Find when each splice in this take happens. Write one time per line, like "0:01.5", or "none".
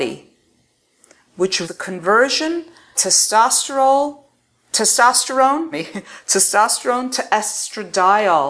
0:01.6
0:02.9
0:05.7